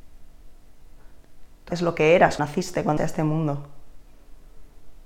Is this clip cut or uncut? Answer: cut